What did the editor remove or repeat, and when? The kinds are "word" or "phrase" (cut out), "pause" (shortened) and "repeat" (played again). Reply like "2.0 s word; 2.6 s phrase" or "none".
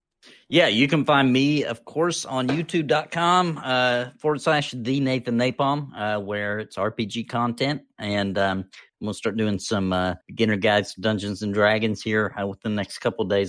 10.2 s pause

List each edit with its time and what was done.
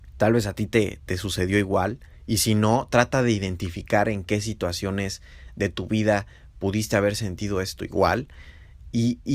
none

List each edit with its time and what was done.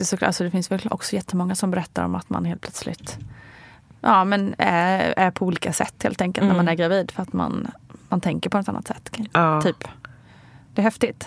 none

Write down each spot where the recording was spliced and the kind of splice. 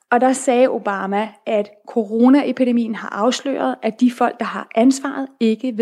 none

